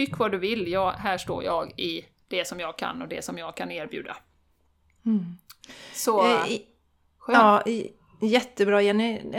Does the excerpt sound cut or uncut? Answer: uncut